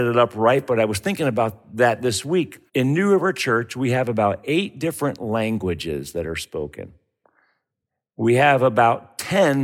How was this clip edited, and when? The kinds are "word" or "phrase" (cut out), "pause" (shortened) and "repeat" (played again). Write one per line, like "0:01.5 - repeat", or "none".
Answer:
0:02.7 - pause